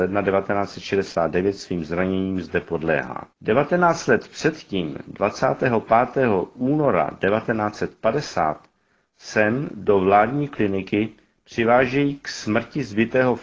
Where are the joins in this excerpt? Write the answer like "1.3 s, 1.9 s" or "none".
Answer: 3.3 s